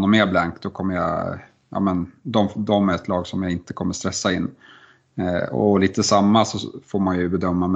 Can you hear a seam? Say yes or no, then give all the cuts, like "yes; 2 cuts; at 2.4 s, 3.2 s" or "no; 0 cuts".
no; 0 cuts